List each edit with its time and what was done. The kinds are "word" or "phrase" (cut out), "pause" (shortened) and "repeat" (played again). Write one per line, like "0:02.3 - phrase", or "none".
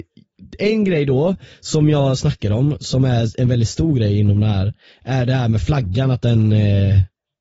none